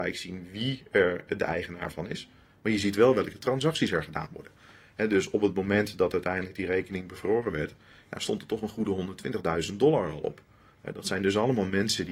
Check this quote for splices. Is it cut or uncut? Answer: uncut